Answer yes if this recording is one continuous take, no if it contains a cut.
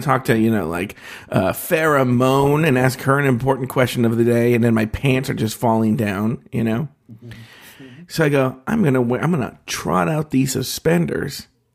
yes